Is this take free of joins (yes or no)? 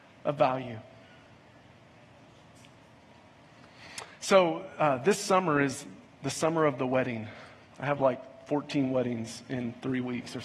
yes